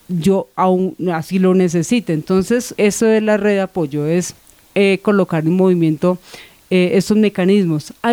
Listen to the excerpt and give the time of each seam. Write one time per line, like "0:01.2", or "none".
0:02.8